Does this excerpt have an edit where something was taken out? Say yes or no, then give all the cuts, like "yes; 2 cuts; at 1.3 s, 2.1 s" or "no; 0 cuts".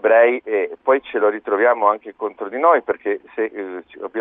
no; 0 cuts